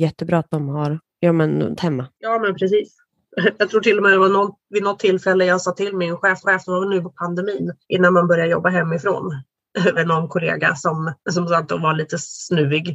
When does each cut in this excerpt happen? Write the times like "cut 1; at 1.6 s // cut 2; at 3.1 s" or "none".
cut 1; at 1.1 s // cut 2; at 1.8 s // cut 3; at 2.1 s // cut 4; at 6.4 s // cut 5; at 7.0 s // cut 6; at 7.8 s // cut 7; at 10.0 s // cut 8; at 11.2 s